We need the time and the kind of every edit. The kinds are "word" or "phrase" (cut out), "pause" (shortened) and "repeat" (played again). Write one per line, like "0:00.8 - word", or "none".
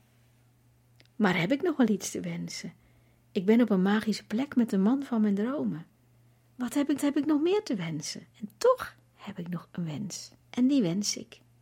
0:07.0 - repeat
0:08.3 - pause
0:10.4 - pause

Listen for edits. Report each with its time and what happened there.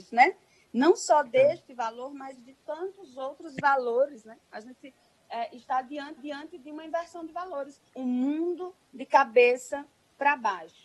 0:06.2 - repeat
0:07.9 - pause

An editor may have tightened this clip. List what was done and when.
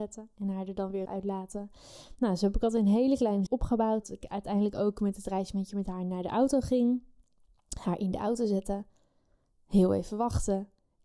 0:01.1 - word
0:03.5 - word
0:04.0 - word

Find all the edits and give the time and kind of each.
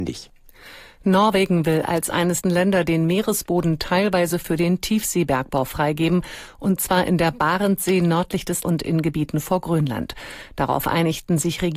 0:02.4 - phrase
0:08.6 - word

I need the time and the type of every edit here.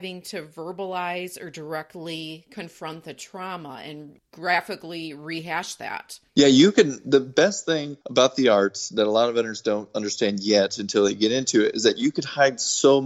0:06.3 - pause
0:08.0 - pause

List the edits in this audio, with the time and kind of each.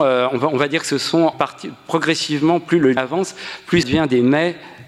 0:01.3 - word
0:03.0 - word
0:03.8 - word

